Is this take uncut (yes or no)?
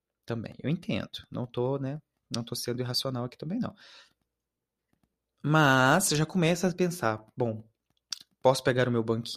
yes